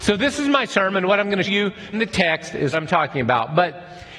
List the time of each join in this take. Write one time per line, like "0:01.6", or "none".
0:01.5
0:01.9
0:02.7